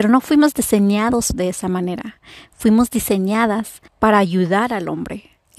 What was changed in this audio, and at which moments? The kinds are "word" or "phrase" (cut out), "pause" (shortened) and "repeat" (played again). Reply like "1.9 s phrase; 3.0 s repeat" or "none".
3.9 s pause